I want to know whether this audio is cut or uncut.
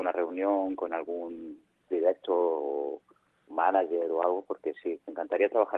cut